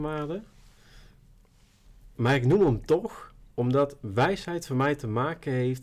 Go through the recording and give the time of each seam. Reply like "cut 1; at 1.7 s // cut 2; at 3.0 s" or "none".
cut 1; at 3.5 s